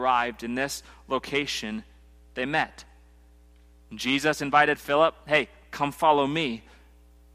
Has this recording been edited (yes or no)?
no